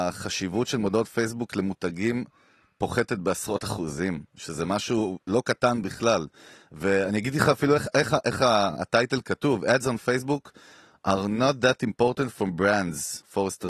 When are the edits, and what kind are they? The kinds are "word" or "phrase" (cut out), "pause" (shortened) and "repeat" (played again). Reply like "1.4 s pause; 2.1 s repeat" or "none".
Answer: none